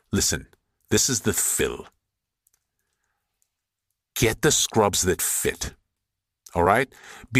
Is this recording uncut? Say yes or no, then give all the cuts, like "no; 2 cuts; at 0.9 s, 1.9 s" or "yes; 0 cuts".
no; 1 cut; at 1.3 s